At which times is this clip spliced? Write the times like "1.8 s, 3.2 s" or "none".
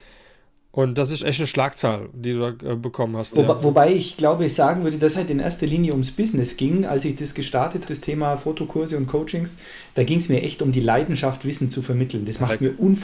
1.2 s, 5.1 s, 7.8 s